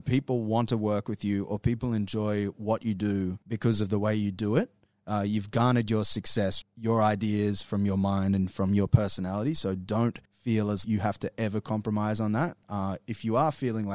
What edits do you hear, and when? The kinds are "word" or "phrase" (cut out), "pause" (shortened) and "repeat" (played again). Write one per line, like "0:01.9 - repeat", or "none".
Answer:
0:03.4 - pause
0:06.6 - word
0:10.2 - pause
0:10.8 - word